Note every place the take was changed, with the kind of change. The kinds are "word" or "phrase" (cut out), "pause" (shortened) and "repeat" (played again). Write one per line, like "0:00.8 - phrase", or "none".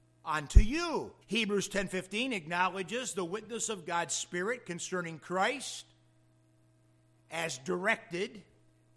0:01.2 - pause

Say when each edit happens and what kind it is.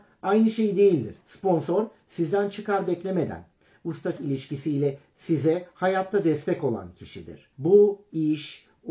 0:01.2 - pause
0:04.2 - word
0:07.5 - pause

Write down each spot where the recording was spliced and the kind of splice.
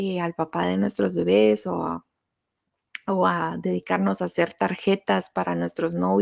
none

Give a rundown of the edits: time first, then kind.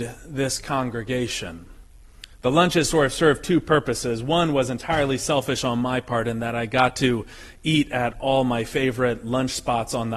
0:02.3 - pause

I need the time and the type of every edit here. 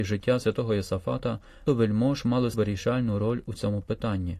0:01.7 - word
0:02.5 - word

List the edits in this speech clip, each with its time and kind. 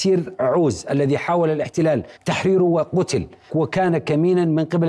0:02.2 - pause
0:03.5 - word

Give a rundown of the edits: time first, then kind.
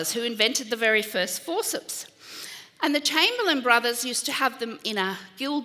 none

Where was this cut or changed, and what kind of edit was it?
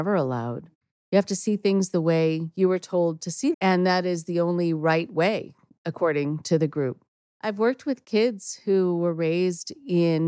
0:03.5 - word
0:07.1 - pause

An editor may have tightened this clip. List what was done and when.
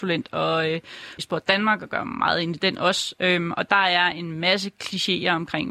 0:01.2 - phrase

